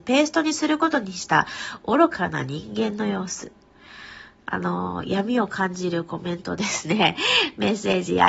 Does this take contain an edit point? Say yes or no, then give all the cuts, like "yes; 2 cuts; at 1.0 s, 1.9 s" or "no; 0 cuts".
no; 0 cuts